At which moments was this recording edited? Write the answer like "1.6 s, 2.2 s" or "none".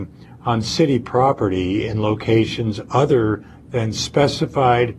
none